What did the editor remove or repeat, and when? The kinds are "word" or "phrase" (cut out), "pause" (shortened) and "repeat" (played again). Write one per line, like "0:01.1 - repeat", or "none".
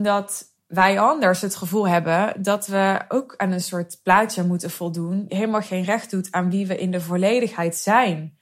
0:05.3 - word